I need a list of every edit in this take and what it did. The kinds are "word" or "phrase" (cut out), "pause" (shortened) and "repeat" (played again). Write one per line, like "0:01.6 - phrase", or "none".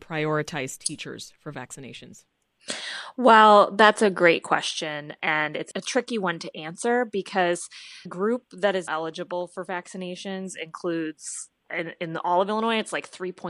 0:08.1 - word
0:08.9 - word
0:11.6 - pause